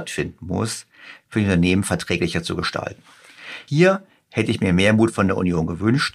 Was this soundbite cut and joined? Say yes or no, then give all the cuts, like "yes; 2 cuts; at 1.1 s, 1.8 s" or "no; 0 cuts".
no; 0 cuts